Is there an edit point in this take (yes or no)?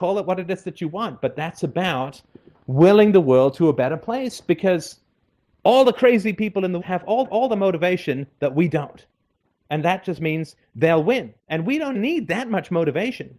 yes